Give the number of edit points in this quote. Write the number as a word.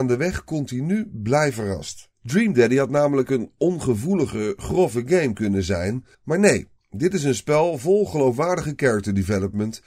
two